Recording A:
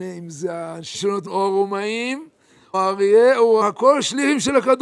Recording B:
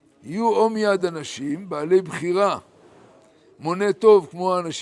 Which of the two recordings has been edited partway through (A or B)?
A